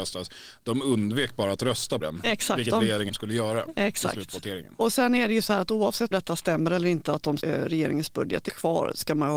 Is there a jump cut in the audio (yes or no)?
yes